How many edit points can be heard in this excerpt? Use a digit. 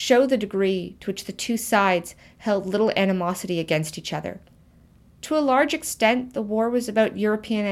0